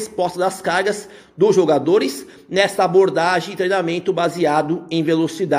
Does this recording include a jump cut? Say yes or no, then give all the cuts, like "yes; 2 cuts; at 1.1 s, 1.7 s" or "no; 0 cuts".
no; 0 cuts